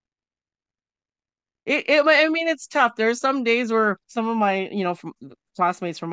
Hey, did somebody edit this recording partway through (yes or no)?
yes